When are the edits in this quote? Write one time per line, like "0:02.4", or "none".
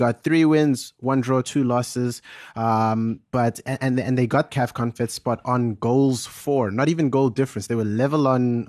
0:04.5

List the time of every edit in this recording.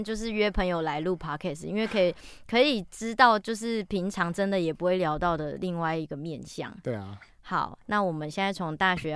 none

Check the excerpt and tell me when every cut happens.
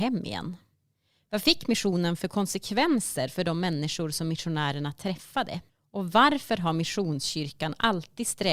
0:05.7

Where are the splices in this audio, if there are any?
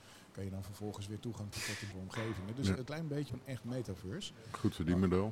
0:01.5
0:01.9
0:02.9
0:03.3

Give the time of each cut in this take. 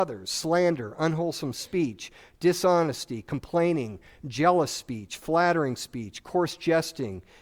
none

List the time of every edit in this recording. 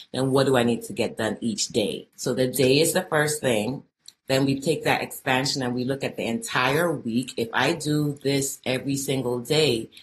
0:02.1

